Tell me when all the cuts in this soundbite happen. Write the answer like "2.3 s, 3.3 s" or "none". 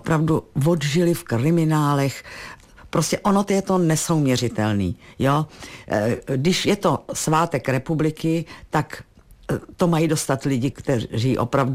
10.7 s